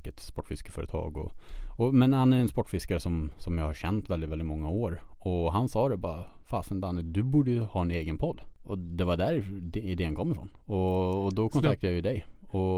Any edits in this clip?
no; 0 cuts

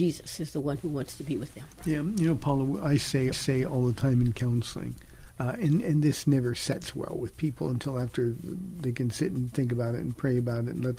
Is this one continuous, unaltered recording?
no; 4 cuts; at 1.7 s, 3.3 s, 5.3 s, 5.8 s

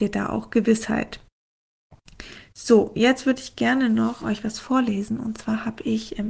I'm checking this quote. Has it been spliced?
yes; 1 cut; at 4.2 s

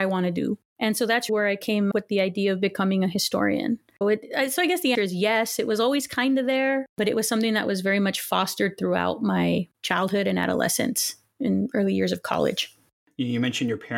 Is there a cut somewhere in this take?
yes; 4 cuts; at 1.3 s, 1.9 s, 4.0 s, 4.9 s

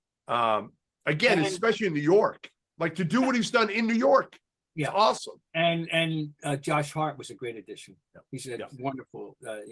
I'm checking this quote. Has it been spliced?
no; 0 cuts

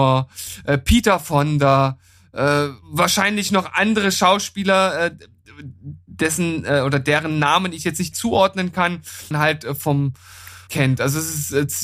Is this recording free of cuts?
no; 4 cuts; at 2.8 s, 8.1 s, 9.3 s, 10.7 s

